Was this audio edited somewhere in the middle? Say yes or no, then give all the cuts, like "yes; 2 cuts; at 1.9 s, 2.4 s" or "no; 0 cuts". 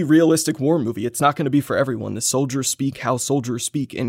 no; 0 cuts